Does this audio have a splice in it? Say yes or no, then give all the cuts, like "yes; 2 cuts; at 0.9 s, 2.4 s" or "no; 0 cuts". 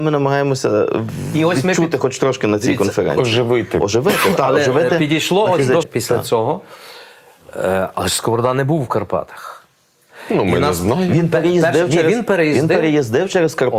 yes; 1 cut; at 5.8 s